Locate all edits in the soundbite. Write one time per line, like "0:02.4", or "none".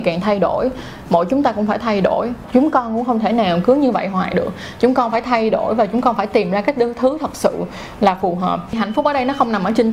none